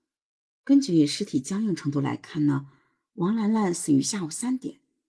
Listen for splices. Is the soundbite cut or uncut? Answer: uncut